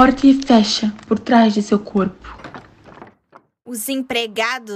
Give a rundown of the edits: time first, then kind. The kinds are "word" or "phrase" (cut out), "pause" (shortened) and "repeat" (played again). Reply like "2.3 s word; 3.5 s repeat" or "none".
none